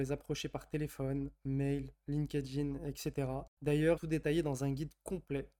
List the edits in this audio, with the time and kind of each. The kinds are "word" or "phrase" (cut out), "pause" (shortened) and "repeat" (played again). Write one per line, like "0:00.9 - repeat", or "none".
0:04.0 - word